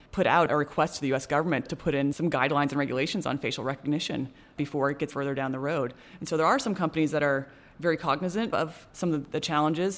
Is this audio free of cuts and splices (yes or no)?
no